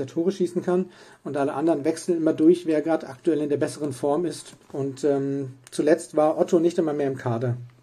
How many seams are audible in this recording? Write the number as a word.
one